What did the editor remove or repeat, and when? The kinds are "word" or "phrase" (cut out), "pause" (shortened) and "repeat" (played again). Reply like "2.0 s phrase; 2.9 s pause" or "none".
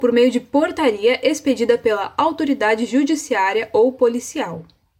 none